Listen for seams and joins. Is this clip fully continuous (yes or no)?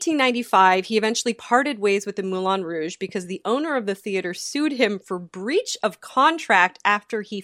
yes